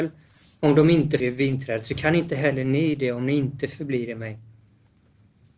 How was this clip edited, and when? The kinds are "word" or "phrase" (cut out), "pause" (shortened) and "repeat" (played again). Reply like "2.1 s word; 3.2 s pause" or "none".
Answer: 1.2 s word